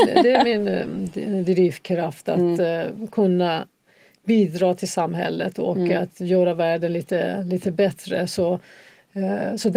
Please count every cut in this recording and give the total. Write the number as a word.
zero